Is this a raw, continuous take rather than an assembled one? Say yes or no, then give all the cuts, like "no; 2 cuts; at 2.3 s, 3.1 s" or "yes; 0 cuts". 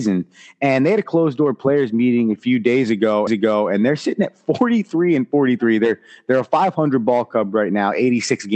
no; 1 cut; at 3.3 s